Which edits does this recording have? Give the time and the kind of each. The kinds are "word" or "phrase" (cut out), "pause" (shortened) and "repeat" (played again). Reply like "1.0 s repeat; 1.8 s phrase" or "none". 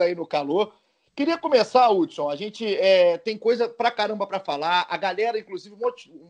none